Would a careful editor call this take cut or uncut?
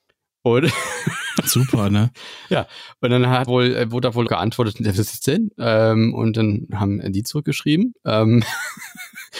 cut